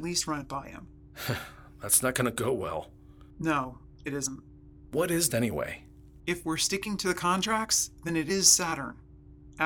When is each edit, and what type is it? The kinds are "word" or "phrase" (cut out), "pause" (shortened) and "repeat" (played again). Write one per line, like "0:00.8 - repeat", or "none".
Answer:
0:05.3 - word